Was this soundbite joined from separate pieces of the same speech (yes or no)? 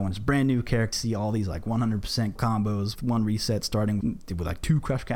yes